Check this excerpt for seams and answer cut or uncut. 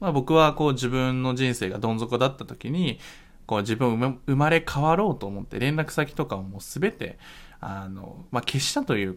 uncut